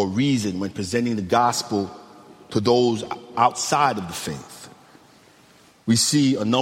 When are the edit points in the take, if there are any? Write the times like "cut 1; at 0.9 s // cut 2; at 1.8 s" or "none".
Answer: none